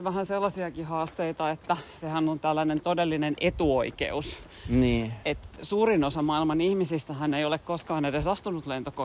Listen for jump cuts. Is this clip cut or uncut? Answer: uncut